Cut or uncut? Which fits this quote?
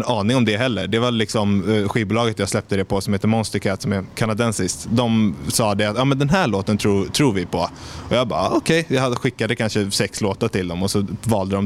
uncut